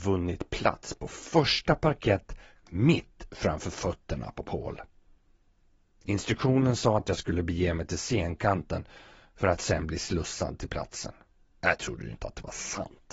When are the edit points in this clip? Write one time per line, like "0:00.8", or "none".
none